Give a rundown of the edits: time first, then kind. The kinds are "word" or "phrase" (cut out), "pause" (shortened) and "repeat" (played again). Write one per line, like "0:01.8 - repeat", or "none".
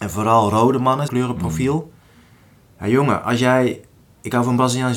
0:01.1 - phrase

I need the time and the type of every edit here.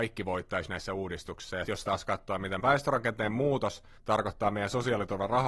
0:01.6 - word
0:02.6 - word
0:04.0 - pause

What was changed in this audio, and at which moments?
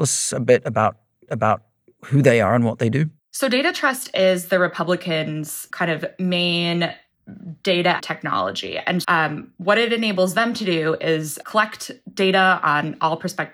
0:01.3 - repeat
0:03.2 - pause
0:05.7 - word
0:08.0 - word
0:09.0 - word
0:11.4 - word

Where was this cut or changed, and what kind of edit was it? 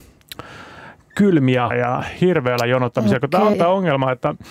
0:01.7 - word
0:03.5 - word

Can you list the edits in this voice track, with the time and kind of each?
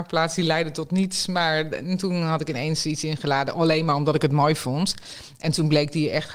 none

